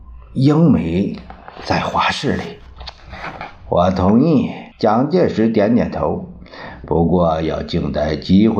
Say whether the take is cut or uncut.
cut